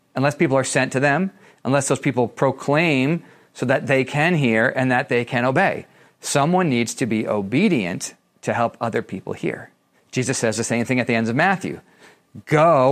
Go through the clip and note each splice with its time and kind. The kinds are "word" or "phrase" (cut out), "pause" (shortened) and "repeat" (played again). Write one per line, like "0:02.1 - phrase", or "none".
0:09.9 - pause